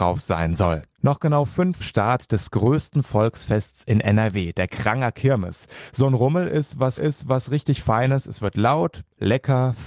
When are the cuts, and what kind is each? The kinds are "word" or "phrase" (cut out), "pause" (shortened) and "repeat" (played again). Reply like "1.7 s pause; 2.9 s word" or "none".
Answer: 0.9 s pause; 1.8 s phrase; 7.0 s repeat